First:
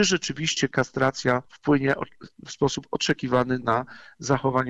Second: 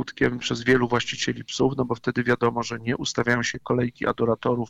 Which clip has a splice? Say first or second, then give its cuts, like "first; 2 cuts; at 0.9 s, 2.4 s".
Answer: first; 1 cut; at 1.5 s